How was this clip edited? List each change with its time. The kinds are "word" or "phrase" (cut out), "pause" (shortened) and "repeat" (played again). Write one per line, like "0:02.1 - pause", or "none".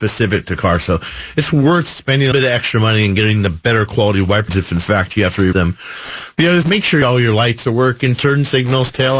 0:02.3 - word
0:04.5 - word
0:05.5 - word
0:06.6 - word